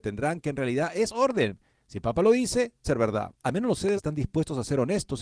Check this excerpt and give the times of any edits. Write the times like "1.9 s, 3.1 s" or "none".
2.8 s, 3.4 s, 4.0 s